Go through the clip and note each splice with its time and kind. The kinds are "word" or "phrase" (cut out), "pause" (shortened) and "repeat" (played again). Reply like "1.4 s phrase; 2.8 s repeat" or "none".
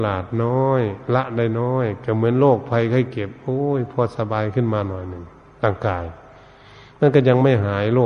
none